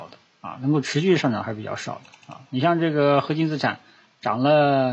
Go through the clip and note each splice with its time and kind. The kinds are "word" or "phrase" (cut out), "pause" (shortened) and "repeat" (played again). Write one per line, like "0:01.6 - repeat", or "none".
none